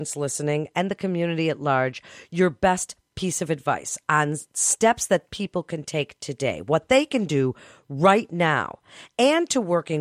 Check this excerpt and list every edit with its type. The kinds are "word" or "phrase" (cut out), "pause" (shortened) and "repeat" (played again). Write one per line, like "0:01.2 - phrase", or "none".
none